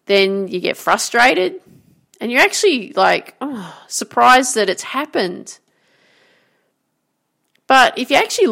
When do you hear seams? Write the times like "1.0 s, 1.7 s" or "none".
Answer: none